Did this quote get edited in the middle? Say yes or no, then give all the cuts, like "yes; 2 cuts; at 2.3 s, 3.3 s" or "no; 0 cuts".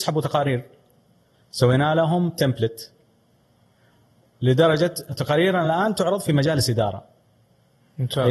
no; 0 cuts